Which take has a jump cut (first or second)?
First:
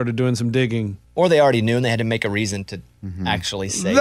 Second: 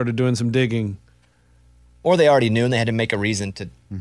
first